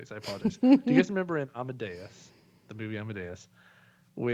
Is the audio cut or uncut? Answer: uncut